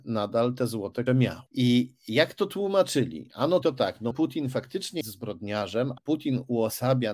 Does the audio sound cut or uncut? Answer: cut